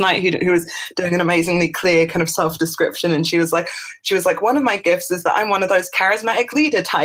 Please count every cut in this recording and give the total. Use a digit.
0